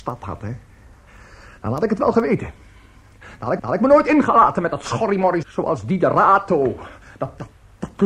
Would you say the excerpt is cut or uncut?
cut